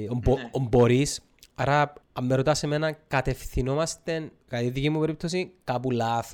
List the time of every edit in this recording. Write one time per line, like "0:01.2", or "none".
0:02.0
0:04.4